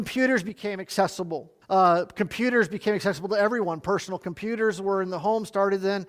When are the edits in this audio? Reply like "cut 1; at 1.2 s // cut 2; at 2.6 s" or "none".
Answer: cut 1; at 1.6 s